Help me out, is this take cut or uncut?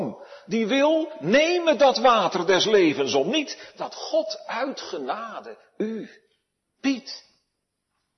uncut